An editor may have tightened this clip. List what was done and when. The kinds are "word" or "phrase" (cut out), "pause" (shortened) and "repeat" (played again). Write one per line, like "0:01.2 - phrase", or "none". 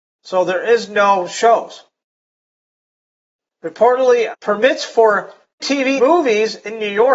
0:04.3 - word
0:05.6 - word
0:06.0 - word

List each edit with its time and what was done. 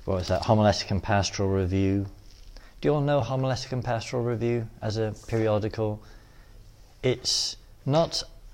none

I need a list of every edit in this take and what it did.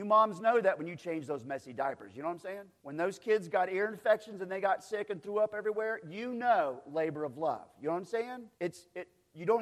0:02.8 - pause
0:08.5 - pause

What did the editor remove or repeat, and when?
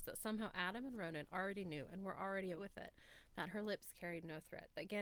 0:02.6 - word

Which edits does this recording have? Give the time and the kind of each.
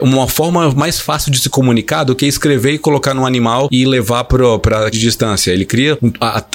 0:04.9 - word

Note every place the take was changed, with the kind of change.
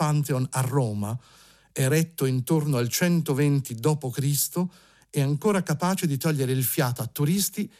none

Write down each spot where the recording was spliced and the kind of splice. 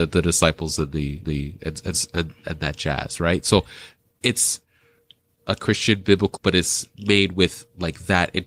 0:01.2 - repeat
0:05.4 - phrase
0:06.4 - word

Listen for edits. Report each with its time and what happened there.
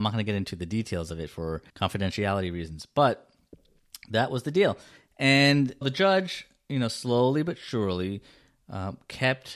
0:01.7 - pause
0:05.8 - word

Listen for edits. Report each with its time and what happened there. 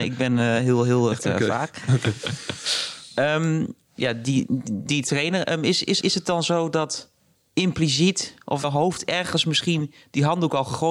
0:01.2 - word
0:03.8 - pause
0:06.0 - word
0:07.3 - pause
0:08.6 - phrase

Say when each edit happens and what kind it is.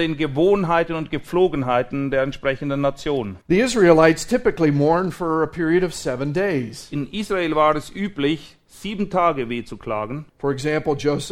0:03.4 - pause
0:10.3 - pause

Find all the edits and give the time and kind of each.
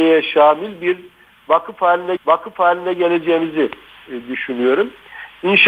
0:02.2 - repeat

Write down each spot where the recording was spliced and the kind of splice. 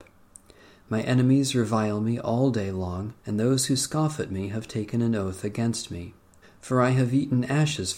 0:03.2 - pause
0:06.4 - pause

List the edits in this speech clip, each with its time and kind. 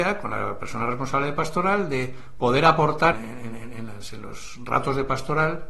0:03.1 - word

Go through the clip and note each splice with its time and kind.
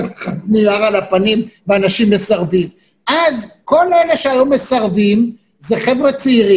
none

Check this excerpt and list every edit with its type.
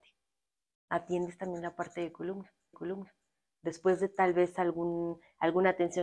0:02.7 - repeat

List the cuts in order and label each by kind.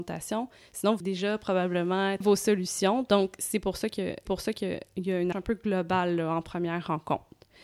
0:01.0 - word
0:02.2 - phrase
0:04.3 - repeat
0:05.3 - word

